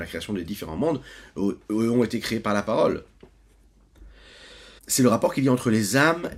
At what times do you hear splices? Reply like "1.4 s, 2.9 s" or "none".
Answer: 4.8 s